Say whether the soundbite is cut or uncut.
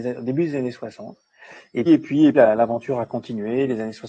cut